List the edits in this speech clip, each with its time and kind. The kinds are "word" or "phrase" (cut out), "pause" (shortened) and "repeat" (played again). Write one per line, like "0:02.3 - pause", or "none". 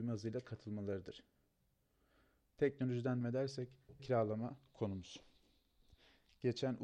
0:03.2 - word
0:04.0 - word